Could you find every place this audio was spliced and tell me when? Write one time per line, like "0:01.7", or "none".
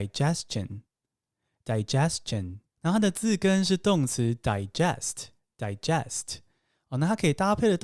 0:05.4